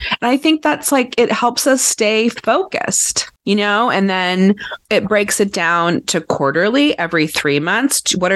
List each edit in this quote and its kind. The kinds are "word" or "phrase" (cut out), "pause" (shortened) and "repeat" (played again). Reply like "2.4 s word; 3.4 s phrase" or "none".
3.4 s pause; 4.8 s pause